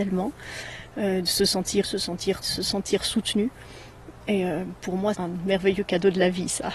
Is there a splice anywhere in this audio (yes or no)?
yes